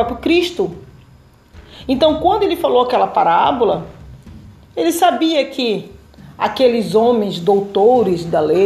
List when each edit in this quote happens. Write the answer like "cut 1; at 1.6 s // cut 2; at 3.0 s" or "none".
none